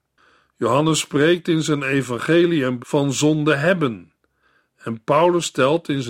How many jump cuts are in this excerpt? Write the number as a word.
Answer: one